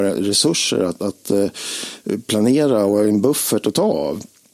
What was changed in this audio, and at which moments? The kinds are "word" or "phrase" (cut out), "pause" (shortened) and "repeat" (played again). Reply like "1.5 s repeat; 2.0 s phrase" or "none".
none

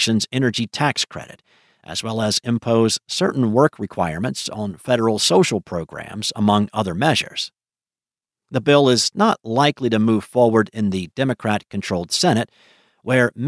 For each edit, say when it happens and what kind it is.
none

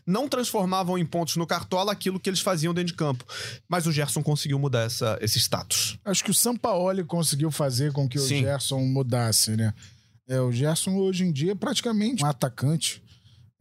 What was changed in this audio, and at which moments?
12.2 s word

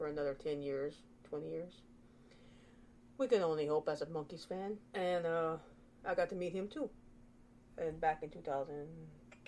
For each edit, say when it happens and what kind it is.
4.9 s pause

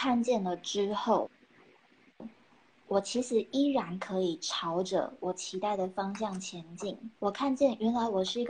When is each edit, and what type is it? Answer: 7.1 s pause

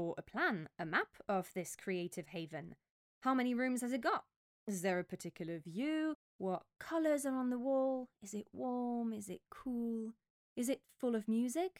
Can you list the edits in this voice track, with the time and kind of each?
none

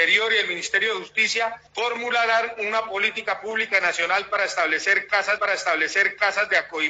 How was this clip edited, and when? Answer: 1.7 s pause; 5.4 s repeat

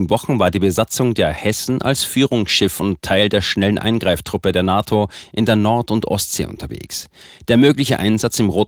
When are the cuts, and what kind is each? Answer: none

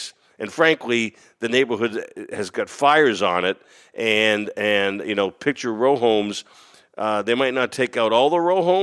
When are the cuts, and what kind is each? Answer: none

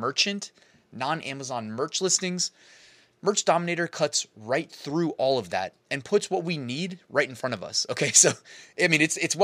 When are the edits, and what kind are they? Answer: none

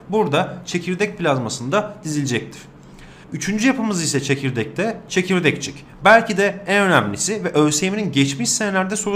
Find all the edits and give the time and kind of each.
3.2 s pause

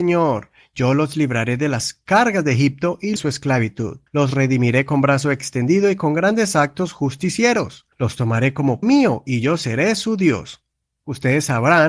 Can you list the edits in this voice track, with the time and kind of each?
3.2 s phrase; 4.1 s pause; 7.9 s pause; 8.8 s word

